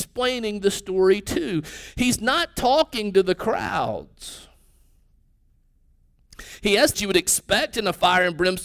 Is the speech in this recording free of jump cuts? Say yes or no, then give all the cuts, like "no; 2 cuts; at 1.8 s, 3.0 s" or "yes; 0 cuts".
no; 1 cut; at 6.9 s